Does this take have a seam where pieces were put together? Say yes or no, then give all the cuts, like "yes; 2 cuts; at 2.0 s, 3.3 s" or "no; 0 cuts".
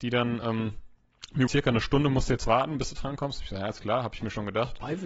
yes; 1 cut; at 1.5 s